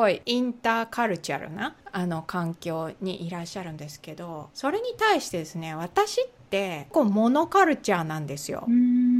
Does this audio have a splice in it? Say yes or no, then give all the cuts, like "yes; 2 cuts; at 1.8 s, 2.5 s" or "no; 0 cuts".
no; 0 cuts